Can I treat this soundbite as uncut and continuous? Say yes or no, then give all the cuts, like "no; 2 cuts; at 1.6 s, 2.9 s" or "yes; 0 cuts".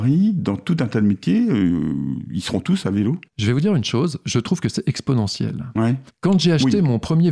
no; 2 cuts; at 3.3 s, 6.1 s